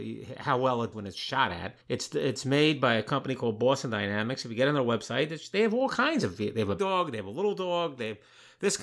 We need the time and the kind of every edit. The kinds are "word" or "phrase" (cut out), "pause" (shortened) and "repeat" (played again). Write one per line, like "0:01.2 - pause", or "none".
0:00.9 - word
0:01.8 - pause
0:06.8 - word